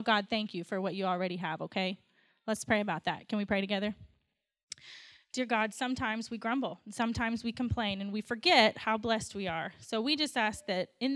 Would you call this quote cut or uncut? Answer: uncut